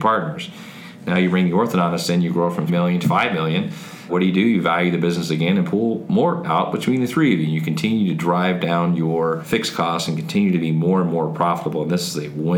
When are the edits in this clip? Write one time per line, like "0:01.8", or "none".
0:02.7
0:03.0
0:06.4